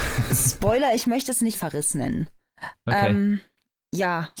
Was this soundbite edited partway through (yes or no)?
yes